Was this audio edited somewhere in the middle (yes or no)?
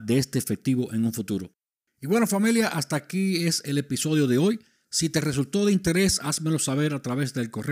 no